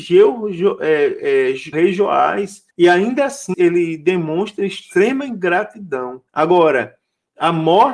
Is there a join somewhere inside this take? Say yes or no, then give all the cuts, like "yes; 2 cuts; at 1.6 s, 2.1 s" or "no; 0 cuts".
yes; 4 cuts; at 1.7 s, 2.7 s, 3.5 s, 6.3 s